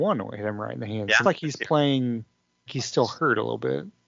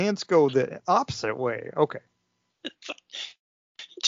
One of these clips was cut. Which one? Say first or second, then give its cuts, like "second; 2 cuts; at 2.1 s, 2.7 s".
first; 2 cuts; at 1.2 s, 2.7 s